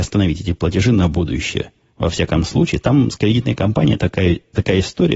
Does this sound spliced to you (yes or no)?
no